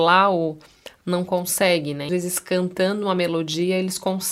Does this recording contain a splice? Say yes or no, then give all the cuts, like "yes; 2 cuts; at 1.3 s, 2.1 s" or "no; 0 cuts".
yes; 2 cuts; at 1.0 s, 2.1 s